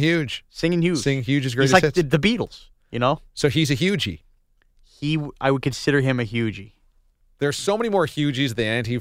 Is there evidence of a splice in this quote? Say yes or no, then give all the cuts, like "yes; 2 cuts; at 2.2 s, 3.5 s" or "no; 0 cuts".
no; 0 cuts